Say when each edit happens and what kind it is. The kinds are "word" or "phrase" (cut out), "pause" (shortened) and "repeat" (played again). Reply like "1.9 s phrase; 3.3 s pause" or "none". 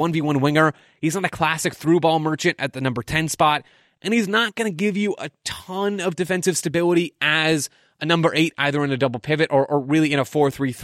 none